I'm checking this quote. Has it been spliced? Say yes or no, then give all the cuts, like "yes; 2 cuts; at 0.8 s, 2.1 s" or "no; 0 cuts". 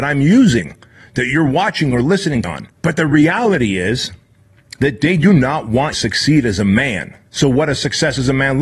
yes; 4 cuts; at 2.4 s, 2.8 s, 5.9 s, 7.3 s